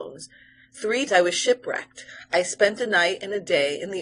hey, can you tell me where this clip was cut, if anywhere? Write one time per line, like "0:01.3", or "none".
0:01.1